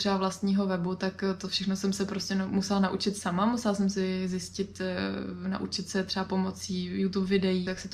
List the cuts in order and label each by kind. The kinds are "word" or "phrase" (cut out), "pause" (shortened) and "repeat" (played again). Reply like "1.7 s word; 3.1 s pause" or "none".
none